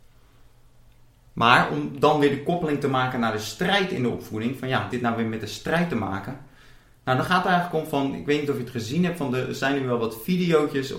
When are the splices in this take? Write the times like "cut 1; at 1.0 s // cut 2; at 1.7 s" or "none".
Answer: cut 1; at 4.9 s